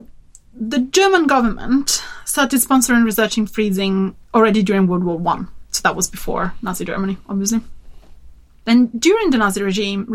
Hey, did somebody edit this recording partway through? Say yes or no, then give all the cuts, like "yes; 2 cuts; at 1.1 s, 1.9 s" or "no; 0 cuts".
no; 0 cuts